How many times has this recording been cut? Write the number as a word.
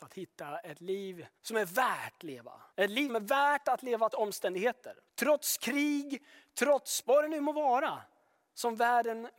seven